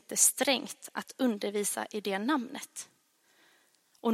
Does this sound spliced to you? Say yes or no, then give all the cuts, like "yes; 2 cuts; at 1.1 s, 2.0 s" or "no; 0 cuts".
no; 0 cuts